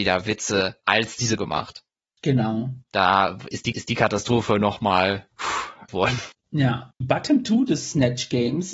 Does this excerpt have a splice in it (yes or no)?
yes